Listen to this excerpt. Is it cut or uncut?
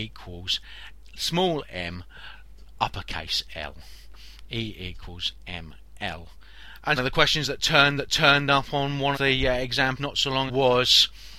cut